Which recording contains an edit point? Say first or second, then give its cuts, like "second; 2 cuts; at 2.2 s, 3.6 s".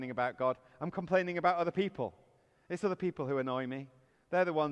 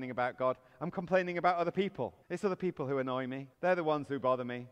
second; 2 cuts; at 2.2 s, 3.5 s